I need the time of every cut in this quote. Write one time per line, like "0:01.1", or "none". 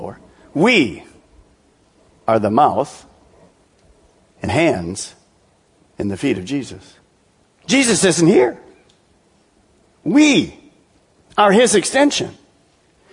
0:04.5
0:07.3